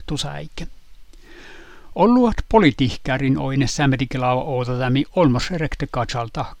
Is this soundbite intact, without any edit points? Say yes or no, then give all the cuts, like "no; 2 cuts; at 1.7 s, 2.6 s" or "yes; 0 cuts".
yes; 0 cuts